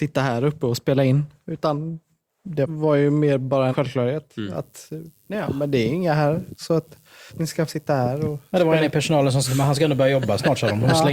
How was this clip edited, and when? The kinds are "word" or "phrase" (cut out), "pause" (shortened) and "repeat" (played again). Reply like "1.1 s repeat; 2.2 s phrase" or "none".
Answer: 2.7 s word; 3.7 s word; 7.3 s word; 7.7 s word; 9.4 s word